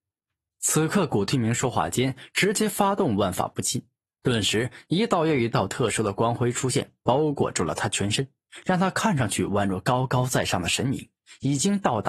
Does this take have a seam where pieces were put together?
no; 0 cuts

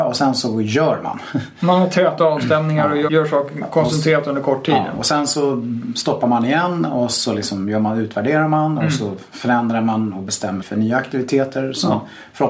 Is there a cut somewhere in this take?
yes; 2 cuts; at 3.1 s, 10.6 s

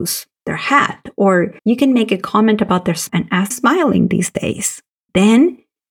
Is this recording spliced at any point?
yes; 4 cuts; at 1.6 s, 3.1 s, 3.5 s, 4.9 s

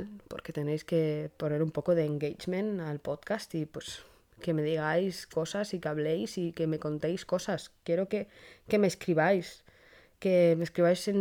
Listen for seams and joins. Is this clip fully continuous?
yes; 0 cuts

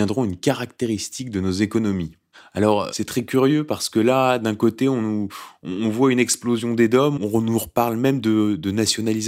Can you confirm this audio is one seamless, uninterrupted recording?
no; 1 cut; at 7.2 s

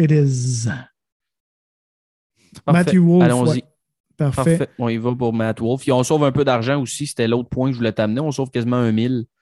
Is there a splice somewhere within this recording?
no; 0 cuts

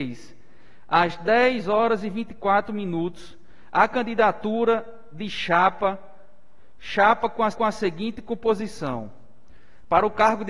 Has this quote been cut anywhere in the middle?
yes; 1 cut; at 7.5 s

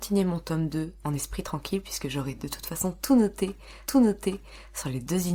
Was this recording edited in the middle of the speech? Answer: yes; 2 cuts; at 1.1 s, 3.9 s

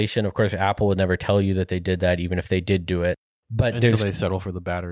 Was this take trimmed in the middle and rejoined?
no; 0 cuts

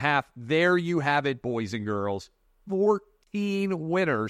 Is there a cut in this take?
no; 0 cuts

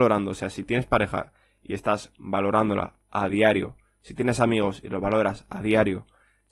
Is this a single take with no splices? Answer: yes; 0 cuts

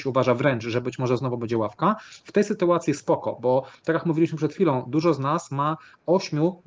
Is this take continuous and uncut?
yes; 0 cuts

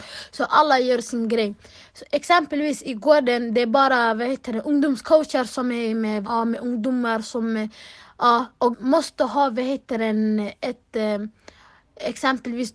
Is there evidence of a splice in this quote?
yes; 2 cuts; at 6.2 s, 8.7 s

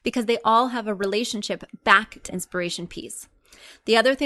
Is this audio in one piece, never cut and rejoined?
no; 1 cut; at 2.3 s

